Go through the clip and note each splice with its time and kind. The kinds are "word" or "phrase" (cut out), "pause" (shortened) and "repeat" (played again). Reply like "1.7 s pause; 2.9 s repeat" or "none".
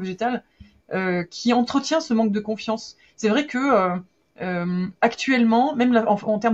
none